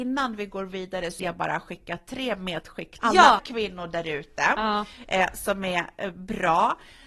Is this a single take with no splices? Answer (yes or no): no